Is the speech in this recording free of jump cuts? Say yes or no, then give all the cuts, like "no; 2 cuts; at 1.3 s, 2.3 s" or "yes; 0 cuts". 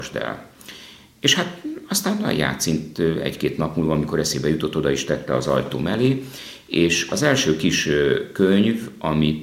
yes; 0 cuts